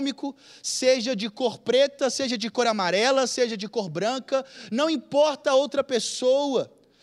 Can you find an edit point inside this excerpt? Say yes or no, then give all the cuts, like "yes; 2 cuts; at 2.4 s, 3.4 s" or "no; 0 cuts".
no; 0 cuts